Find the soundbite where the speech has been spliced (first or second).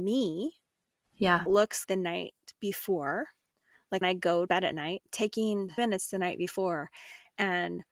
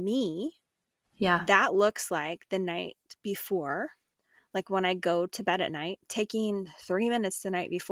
first